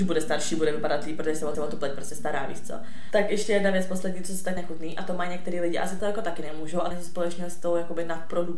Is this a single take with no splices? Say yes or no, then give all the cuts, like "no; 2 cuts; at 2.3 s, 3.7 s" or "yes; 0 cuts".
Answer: no; 4 cuts; at 1.5 s, 4.6 s, 6.0 s, 6.9 s